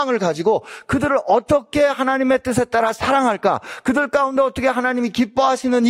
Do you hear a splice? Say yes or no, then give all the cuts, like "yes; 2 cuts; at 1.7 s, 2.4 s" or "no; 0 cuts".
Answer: no; 0 cuts